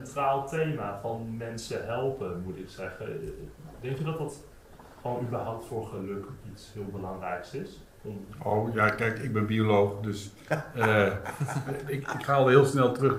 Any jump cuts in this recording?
no; 0 cuts

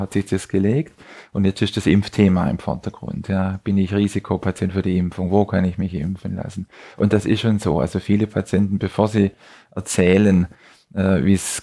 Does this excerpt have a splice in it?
no; 0 cuts

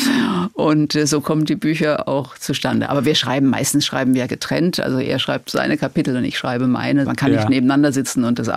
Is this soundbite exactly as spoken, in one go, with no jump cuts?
yes; 0 cuts

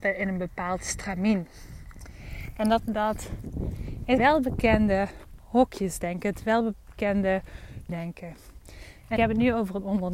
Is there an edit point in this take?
yes; 4 cuts; at 2.8 s, 4.2 s, 7.9 s, 9.2 s

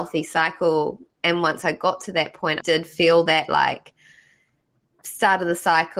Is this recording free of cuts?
no; 1 cut; at 2.6 s

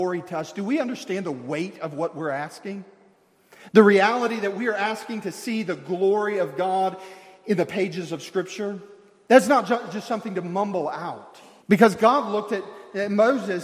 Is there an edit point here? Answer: yes; 1 cut; at 11.6 s

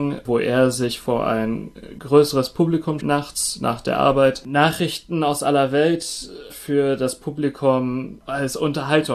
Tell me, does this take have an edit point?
yes; 2 cuts; at 3.0 s, 6.5 s

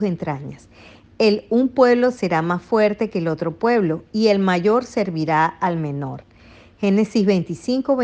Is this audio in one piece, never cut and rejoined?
yes; 0 cuts

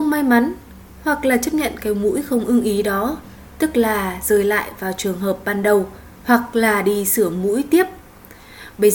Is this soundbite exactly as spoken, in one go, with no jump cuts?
no; 1 cut; at 6.1 s

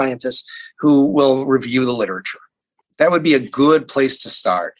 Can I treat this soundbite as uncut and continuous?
yes; 0 cuts

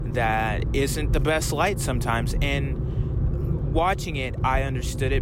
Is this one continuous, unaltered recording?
yes; 0 cuts

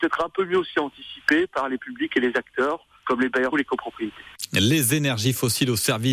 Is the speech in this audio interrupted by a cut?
yes; 3 cuts; at 1.8 s, 3.0 s, 3.5 s

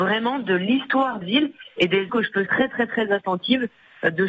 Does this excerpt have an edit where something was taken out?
yes; 3 cuts; at 1.2 s, 2.1 s, 2.5 s

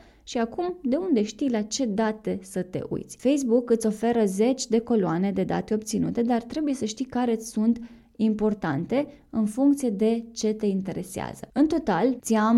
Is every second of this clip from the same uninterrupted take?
yes; 0 cuts

